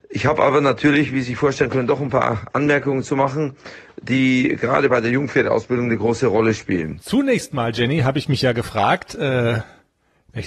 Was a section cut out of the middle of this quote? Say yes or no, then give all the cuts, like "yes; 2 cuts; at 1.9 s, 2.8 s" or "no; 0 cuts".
no; 0 cuts